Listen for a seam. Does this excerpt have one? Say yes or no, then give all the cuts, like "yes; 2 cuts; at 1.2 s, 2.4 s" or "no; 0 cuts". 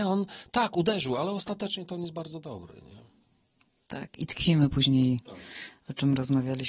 no; 0 cuts